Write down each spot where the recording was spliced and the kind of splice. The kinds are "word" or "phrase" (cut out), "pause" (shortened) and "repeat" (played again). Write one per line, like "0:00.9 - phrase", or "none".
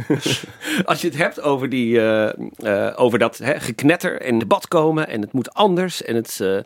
0:04.4 - phrase